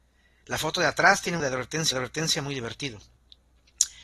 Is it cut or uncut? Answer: cut